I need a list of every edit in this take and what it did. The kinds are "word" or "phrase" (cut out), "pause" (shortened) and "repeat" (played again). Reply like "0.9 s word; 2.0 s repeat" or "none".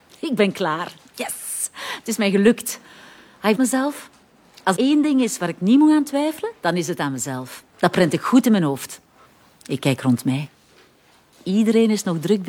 3.5 s phrase; 4.7 s word; 7.7 s pause; 9.2 s pause